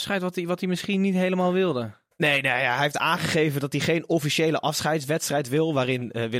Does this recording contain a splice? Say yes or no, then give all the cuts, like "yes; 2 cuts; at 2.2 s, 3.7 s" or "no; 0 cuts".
no; 0 cuts